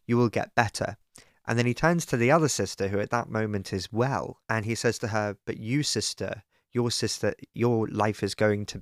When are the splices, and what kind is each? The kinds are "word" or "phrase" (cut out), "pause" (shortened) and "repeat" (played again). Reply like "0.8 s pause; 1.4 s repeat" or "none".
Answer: 4.4 s pause